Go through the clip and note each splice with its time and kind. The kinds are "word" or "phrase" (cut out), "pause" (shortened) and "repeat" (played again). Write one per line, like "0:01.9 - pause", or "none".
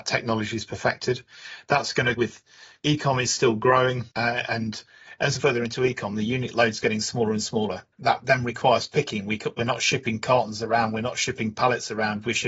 0:02.2 - word
0:04.1 - pause
0:05.4 - phrase
0:07.9 - pause

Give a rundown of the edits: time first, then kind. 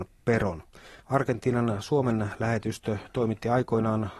0:01.0 - pause

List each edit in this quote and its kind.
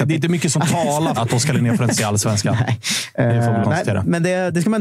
0:01.2 - word
0:02.0 - word
0:03.6 - word

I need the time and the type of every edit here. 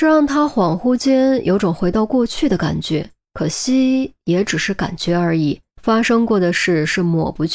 0:03.2 - pause
0:05.7 - pause

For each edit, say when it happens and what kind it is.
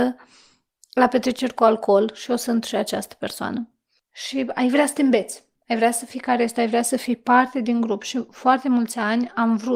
none

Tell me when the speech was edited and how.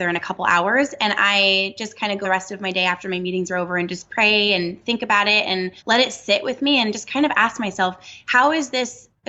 0:02.2 - phrase
0:05.8 - pause

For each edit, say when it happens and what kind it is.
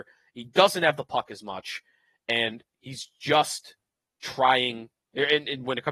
none

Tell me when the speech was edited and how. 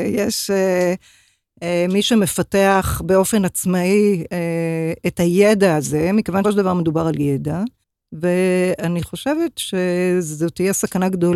0:06.4 - word
0:07.8 - pause

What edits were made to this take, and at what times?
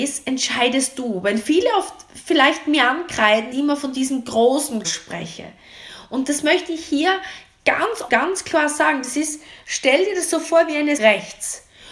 0:03.5 - word
0:04.8 - word
0:08.1 - phrase
0:11.0 - phrase

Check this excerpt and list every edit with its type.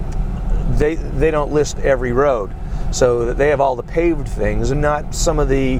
0:01.0 - word
0:04.7 - word

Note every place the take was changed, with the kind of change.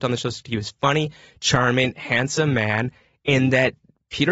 none

